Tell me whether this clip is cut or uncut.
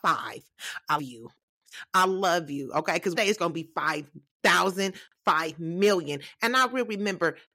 cut